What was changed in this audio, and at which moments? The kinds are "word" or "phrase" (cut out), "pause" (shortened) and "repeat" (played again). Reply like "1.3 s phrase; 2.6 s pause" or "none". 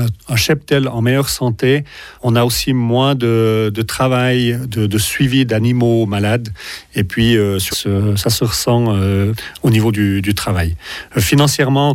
2.2 s pause; 7.7 s phrase